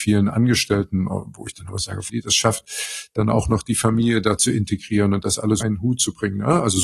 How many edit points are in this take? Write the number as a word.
two